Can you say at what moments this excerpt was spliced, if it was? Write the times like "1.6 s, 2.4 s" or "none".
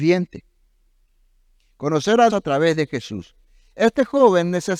2.3 s